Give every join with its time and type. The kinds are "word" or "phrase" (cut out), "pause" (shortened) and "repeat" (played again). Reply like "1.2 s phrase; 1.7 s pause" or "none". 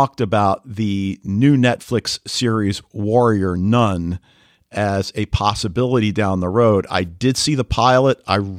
none